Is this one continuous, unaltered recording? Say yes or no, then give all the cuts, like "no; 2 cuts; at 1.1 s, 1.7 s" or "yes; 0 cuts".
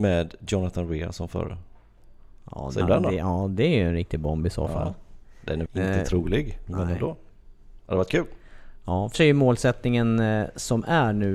no; 3 cuts; at 2.8 s, 5.7 s, 9.1 s